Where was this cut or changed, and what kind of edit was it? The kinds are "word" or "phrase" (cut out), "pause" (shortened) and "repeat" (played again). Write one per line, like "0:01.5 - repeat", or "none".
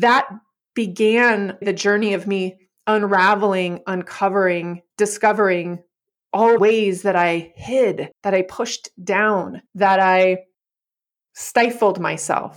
0:01.6 - phrase
0:04.9 - pause
0:06.6 - phrase
0:08.2 - pause
0:09.7 - pause